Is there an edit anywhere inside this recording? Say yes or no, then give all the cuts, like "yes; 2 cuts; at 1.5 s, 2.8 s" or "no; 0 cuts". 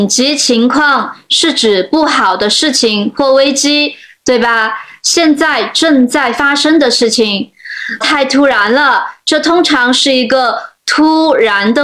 yes; 1 cut; at 8.0 s